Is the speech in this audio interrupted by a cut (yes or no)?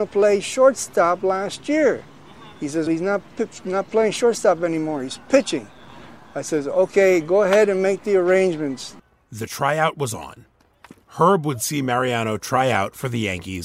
yes